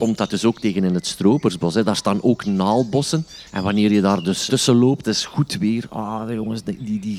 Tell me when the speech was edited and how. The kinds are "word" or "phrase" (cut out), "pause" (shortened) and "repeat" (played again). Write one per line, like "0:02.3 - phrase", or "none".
0:03.5 - pause
0:04.5 - word
0:05.0 - phrase